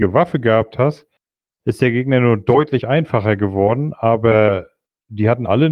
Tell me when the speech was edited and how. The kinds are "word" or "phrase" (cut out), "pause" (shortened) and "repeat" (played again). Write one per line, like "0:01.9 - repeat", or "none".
none

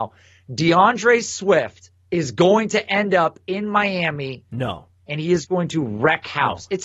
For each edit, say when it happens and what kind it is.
none

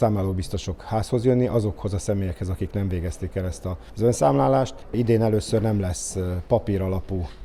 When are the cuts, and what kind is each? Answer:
none

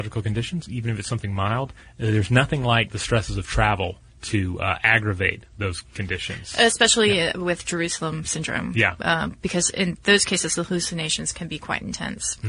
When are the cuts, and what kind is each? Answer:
none

